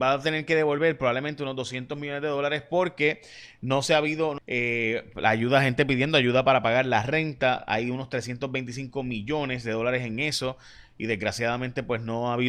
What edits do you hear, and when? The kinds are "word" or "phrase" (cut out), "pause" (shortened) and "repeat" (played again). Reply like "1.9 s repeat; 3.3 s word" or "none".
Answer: 4.4 s phrase